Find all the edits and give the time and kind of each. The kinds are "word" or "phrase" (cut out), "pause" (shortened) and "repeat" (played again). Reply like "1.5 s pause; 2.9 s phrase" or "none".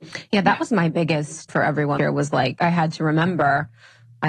1.5 s word; 2.0 s word; 2.6 s word